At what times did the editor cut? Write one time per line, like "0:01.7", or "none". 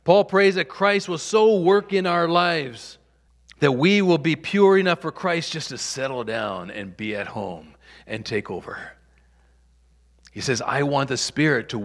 0:03.3